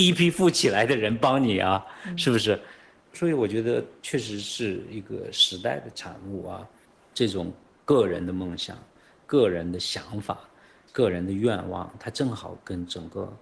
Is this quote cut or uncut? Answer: uncut